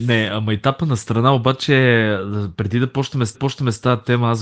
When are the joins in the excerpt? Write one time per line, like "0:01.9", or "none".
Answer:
0:03.3